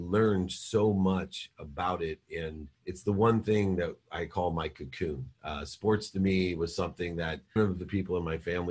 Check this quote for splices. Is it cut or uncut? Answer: cut